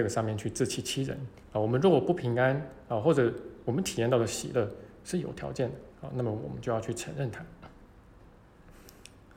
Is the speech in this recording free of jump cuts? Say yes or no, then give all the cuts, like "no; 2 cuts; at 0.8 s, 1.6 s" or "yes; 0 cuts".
no; 2 cuts; at 1.4 s, 5.9 s